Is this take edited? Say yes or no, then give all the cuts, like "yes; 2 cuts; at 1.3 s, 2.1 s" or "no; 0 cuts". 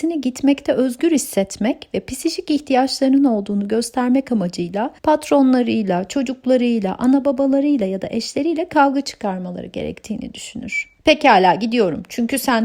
yes; 2 cuts; at 5.0 s, 11.0 s